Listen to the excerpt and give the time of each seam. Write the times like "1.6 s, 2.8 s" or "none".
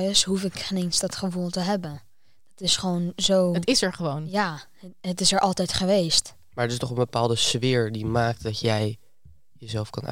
none